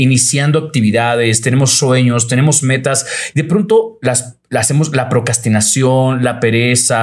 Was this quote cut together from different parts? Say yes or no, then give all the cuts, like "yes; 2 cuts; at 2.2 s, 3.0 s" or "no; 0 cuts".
no; 0 cuts